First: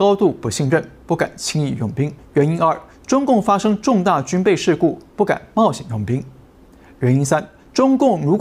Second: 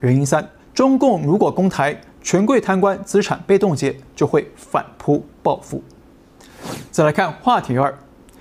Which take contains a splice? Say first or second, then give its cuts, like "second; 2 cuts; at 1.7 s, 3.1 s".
first; 1 cut; at 2.2 s